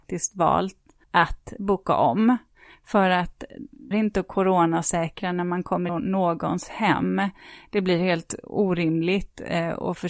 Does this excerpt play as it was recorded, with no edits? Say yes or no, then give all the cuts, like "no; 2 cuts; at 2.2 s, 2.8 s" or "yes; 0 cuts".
no; 3 cuts; at 1.0 s, 3.9 s, 5.9 s